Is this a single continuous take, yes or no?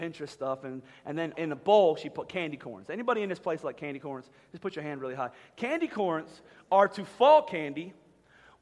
no